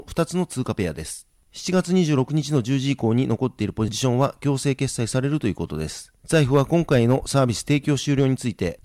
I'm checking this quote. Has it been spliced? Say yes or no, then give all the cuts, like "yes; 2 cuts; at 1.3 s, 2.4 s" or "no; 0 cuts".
no; 0 cuts